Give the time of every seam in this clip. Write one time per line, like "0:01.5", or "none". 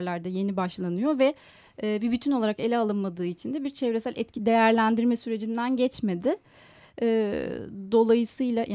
none